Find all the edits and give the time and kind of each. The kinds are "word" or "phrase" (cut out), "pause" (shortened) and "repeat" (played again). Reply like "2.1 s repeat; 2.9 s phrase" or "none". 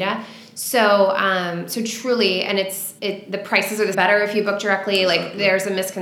3.0 s word; 3.9 s phrase